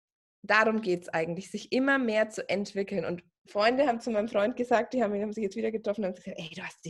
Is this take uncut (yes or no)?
yes